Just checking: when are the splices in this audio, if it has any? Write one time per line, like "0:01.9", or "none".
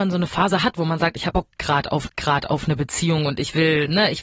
0:01.3
0:02.1